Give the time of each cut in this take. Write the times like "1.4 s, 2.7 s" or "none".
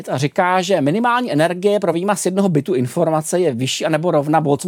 none